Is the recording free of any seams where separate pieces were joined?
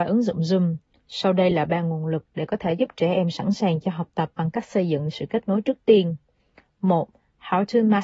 yes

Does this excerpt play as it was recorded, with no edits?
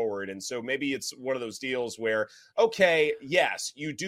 yes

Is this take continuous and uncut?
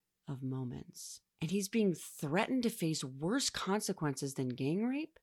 no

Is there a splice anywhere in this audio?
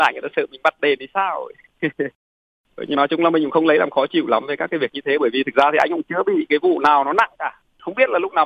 yes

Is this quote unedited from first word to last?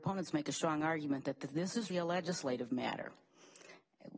no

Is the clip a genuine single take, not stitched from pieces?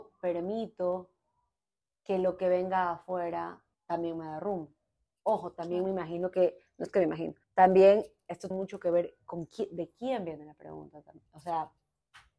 no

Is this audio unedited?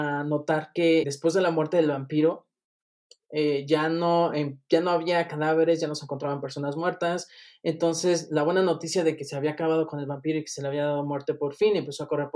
no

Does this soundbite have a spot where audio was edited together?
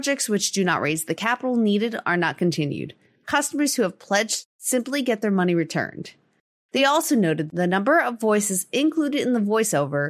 no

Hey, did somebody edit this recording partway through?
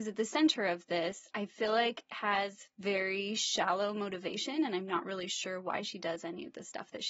yes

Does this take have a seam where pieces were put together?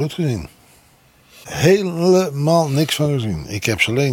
no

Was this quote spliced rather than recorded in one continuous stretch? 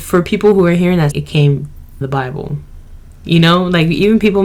yes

